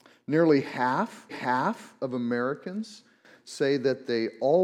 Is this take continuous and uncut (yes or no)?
no